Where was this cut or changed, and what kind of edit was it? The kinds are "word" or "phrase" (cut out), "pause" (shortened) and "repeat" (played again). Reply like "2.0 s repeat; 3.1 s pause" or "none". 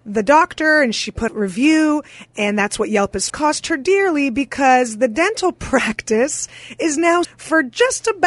1.3 s phrase; 3.3 s phrase; 7.2 s phrase